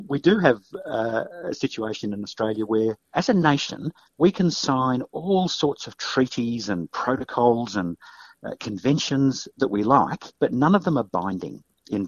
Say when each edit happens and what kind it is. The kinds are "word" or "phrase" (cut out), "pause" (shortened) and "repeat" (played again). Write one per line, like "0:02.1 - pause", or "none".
0:03.0 - pause
0:10.4 - pause